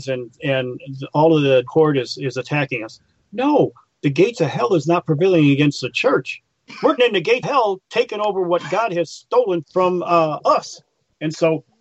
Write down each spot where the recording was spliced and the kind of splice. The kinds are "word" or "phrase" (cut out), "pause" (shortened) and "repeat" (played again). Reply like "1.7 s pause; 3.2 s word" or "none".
1.7 s word; 7.0 s word; 7.4 s word; 9.6 s word